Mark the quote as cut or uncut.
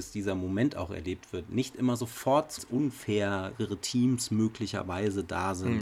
cut